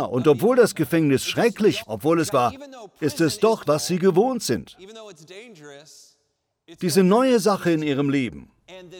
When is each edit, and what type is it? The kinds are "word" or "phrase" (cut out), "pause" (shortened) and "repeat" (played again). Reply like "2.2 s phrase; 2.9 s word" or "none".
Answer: 1.8 s word; 2.3 s word; 3.6 s word